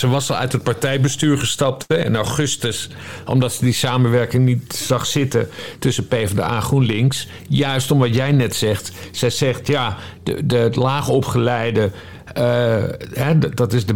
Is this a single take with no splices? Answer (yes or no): yes